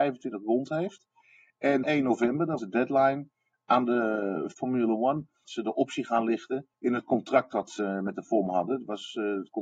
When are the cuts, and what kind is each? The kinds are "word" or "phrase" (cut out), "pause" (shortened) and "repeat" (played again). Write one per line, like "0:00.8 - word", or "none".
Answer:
0:01.8 - phrase
0:02.6 - word
0:04.5 - word
0:05.4 - phrase
0:06.7 - pause